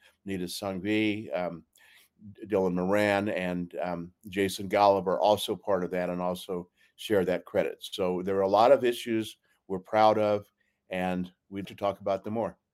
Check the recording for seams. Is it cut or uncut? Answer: cut